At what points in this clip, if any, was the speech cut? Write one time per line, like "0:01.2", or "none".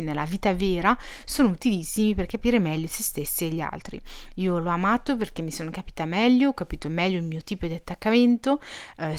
none

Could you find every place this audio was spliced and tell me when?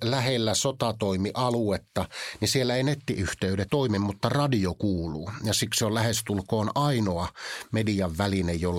0:03.7

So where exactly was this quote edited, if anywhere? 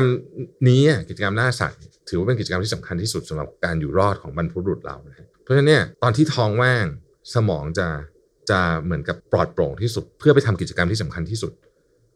0:05.3
0:05.9
0:08.3
0:09.2
0:10.1

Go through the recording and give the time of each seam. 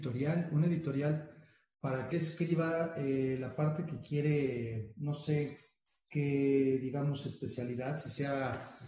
0:02.1

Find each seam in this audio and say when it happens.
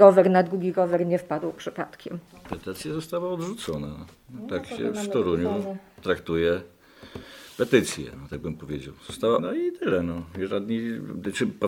0:09.4

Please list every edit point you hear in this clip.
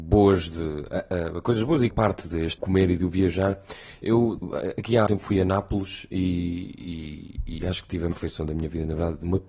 0:01.9
0:02.6
0:04.4
0:05.1
0:08.1

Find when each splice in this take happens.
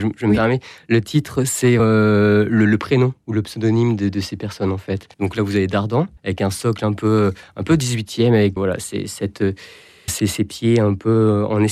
0:01.8
0:05.1
0:06.2
0:08.6
0:10.1

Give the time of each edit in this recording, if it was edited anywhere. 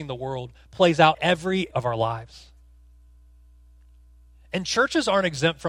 0:01.1
0:01.7

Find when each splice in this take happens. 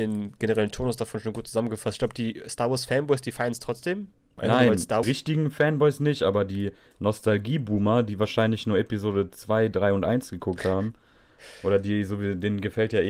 0:05.0

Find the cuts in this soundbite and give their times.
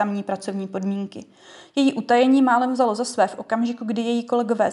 none

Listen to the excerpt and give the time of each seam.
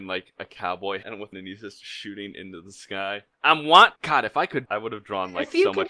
0:01.0
0:01.3
0:03.3
0:04.0
0:04.7

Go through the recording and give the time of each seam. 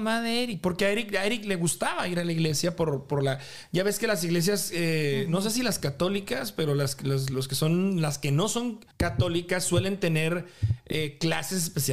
0:08.9

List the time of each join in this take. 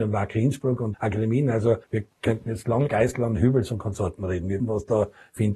0:00.9
0:01.8
0:02.9
0:04.6

